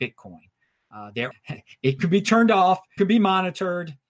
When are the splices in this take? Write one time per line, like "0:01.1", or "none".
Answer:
0:01.3
0:02.0
0:03.0